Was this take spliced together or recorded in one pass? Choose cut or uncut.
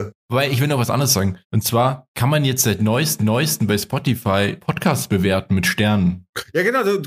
cut